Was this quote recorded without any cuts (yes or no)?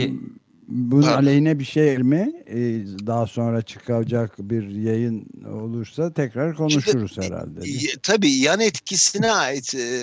no